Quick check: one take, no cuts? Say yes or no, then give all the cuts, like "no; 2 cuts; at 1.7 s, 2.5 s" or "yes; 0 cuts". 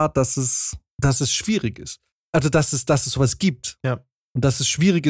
yes; 0 cuts